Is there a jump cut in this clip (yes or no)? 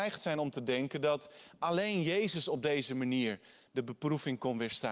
no